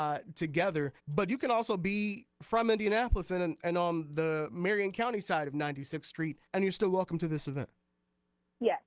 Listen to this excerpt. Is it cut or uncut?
cut